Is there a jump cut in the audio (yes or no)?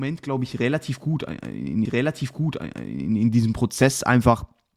yes